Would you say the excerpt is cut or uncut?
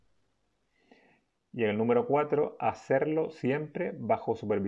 uncut